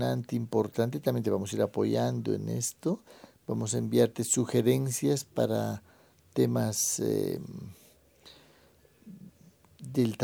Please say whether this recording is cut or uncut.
uncut